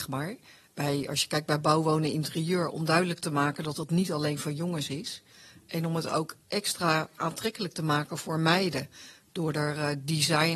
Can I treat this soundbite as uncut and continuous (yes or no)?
yes